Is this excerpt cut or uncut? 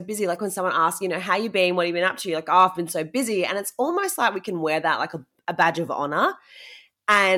uncut